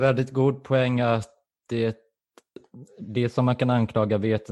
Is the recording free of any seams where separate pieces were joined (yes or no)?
yes